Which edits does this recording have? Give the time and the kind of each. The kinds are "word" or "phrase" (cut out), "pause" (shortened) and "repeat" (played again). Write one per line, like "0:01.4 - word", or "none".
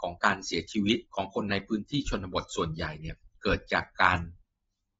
0:01.1 - pause